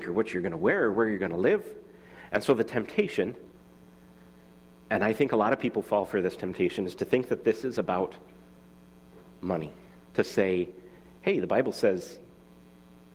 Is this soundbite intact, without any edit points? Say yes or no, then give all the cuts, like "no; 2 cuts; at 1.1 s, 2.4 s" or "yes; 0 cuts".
yes; 0 cuts